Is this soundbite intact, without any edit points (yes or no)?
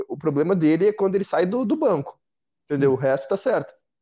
yes